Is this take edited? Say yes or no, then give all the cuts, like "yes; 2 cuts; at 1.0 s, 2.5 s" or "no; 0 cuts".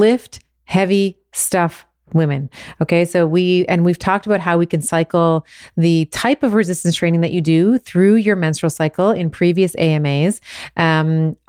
no; 0 cuts